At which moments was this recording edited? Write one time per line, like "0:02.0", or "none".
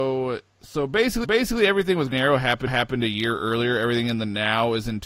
0:01.2
0:02.1
0:02.7